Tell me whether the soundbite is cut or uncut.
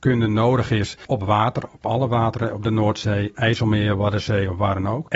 uncut